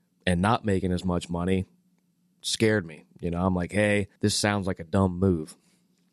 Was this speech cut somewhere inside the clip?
yes; 1 cut; at 4.2 s

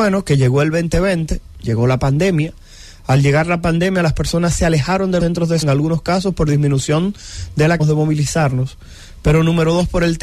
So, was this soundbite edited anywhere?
yes; 3 cuts; at 5.2 s, 5.6 s, 7.8 s

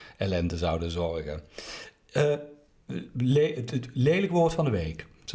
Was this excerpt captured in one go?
yes; 0 cuts

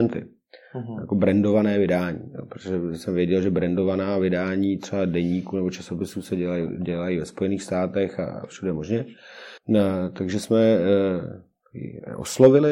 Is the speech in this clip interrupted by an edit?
yes; 1 cut; at 9.6 s

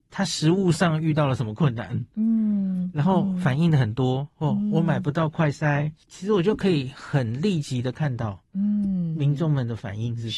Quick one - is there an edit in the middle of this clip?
no; 0 cuts

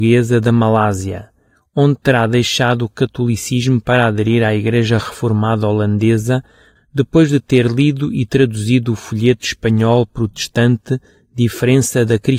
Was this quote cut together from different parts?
no; 0 cuts

